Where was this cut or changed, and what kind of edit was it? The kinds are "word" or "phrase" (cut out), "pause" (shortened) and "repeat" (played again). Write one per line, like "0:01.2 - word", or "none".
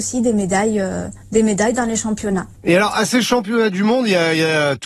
none